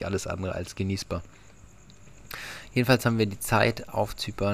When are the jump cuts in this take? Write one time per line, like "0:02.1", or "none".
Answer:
none